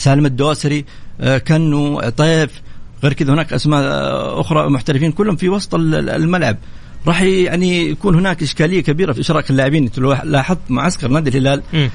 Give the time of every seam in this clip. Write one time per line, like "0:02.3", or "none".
0:09.2